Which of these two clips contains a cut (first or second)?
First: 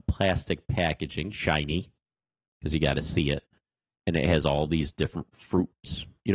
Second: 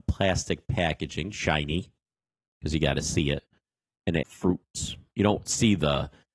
second